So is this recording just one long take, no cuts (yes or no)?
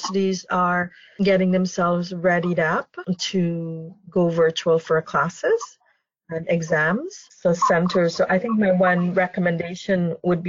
yes